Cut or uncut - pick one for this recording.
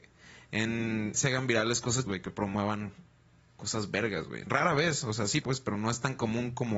cut